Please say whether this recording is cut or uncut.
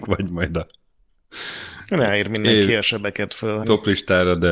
cut